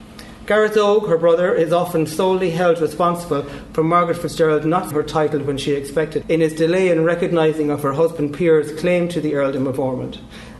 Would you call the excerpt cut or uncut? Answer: cut